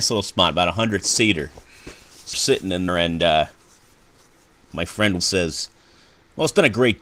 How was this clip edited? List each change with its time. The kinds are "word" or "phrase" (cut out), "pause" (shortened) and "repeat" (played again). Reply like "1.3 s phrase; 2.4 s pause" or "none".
2.3 s word; 2.9 s word; 5.2 s word